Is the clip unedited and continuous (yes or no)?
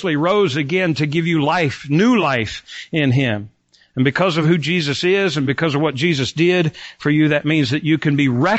yes